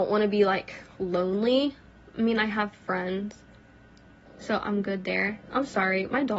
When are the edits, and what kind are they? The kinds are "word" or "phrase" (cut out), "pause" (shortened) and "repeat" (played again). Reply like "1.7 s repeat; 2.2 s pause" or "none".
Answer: none

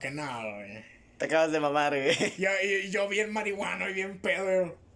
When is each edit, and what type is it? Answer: none

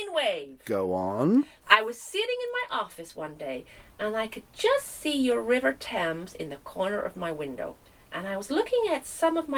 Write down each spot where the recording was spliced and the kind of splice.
none

